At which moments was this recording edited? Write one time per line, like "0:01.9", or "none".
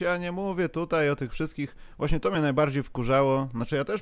none